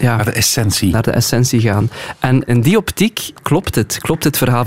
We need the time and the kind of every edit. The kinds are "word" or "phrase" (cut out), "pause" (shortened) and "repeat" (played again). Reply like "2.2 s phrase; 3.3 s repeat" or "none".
2.5 s word; 3.4 s pause